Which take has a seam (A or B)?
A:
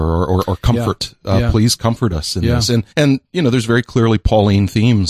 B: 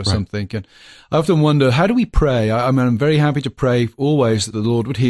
A